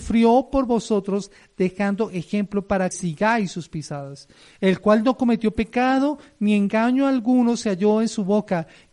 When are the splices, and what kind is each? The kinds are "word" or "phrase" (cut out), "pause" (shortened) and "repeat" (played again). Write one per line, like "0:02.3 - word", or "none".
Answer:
0:02.9 - word